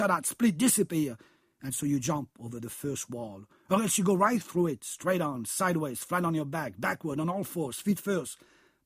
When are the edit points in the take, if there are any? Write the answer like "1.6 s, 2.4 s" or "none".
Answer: none